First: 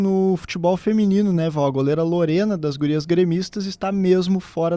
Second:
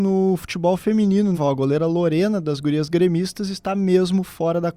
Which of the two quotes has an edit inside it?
second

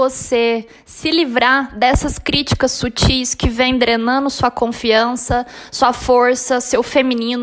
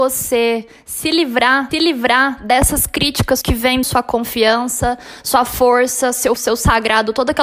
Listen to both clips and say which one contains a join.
second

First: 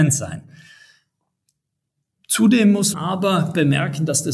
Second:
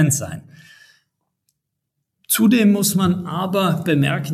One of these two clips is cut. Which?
first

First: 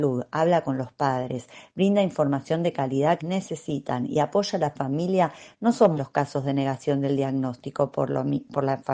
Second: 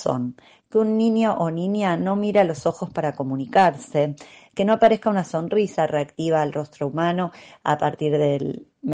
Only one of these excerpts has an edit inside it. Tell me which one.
first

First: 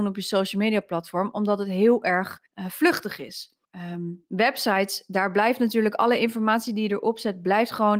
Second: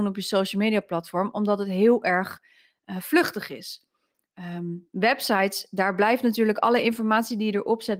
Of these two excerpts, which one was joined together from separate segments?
first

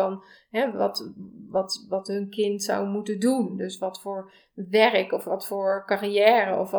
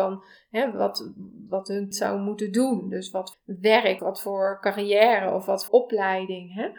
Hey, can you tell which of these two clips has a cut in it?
second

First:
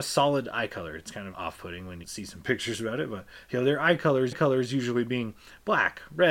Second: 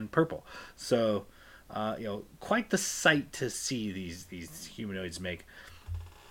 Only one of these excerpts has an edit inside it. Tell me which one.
first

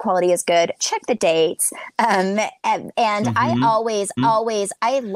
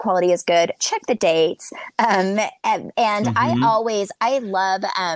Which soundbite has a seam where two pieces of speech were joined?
first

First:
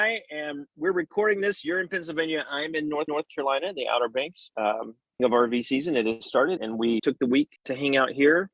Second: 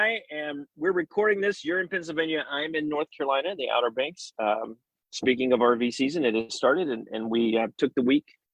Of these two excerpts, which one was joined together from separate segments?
first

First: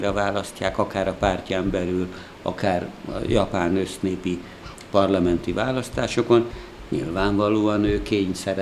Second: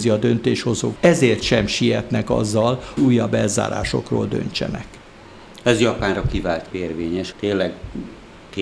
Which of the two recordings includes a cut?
second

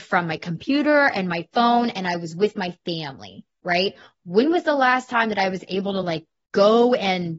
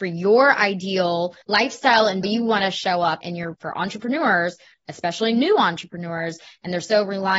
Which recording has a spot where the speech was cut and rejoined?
second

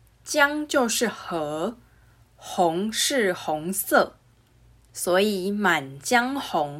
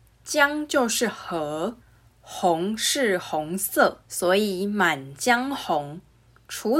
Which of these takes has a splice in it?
second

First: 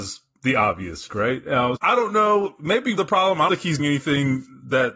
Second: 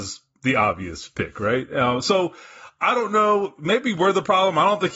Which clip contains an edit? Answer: first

